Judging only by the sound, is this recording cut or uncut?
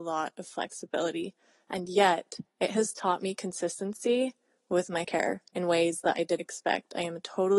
cut